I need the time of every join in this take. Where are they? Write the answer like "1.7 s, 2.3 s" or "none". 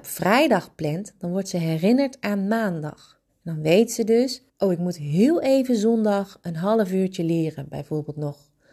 3.3 s, 4.5 s

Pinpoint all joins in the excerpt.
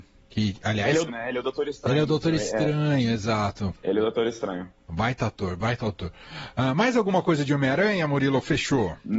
1.1 s

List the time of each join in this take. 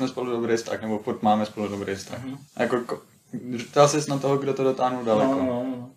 2.5 s

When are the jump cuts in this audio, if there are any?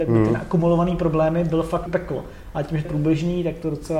1.9 s, 2.8 s

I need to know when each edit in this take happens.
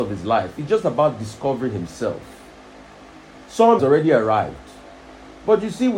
3.8 s

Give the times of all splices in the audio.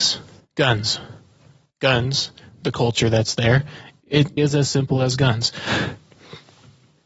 2.7 s, 4.4 s

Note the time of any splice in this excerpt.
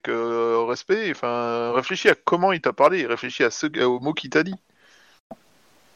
none

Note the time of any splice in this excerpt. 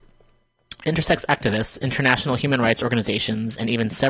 none

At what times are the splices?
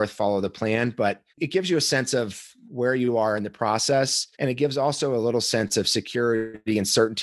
1.3 s, 4.3 s

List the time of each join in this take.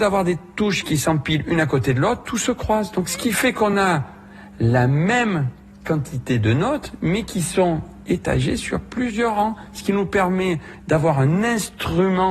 none

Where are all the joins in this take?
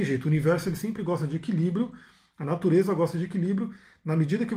none

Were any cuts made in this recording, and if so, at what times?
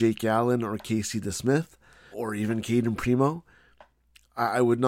2.1 s

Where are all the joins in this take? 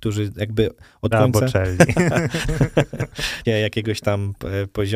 1.1 s, 3.4 s

